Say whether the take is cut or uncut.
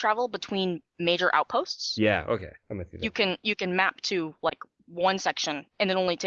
cut